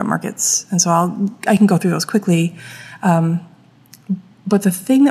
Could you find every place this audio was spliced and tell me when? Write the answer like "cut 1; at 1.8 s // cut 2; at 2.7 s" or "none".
none